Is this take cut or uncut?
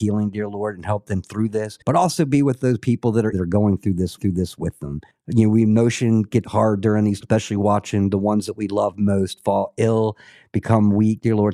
cut